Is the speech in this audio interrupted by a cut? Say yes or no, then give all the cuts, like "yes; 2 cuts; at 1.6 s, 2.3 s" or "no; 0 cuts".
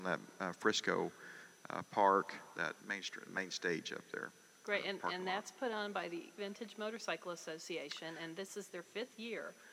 yes; 3 cuts; at 2.8 s, 3.3 s, 6.4 s